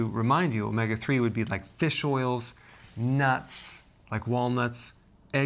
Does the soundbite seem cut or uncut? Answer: uncut